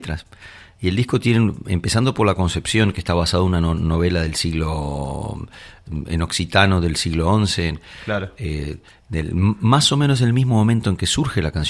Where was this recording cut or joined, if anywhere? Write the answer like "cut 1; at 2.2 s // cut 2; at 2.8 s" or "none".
none